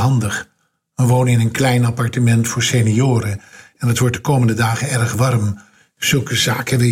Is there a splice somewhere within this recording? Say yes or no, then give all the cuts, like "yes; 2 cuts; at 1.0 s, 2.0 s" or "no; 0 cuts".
no; 0 cuts